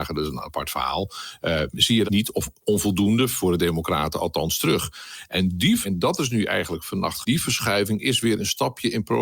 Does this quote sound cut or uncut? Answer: cut